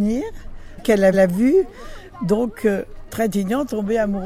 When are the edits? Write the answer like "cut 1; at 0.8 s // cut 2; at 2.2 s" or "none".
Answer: cut 1; at 1.1 s